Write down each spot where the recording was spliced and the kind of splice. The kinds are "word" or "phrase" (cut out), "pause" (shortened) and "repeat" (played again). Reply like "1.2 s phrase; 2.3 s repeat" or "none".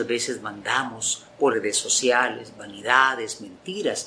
1.5 s word